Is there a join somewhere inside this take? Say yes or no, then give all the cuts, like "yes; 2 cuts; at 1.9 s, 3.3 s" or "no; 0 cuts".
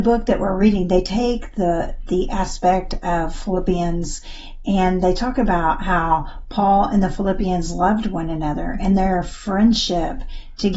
no; 0 cuts